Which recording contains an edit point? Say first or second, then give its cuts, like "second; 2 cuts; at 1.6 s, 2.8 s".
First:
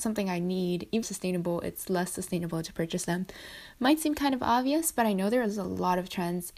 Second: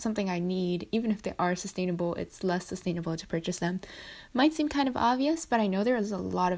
first; 1 cut; at 1.0 s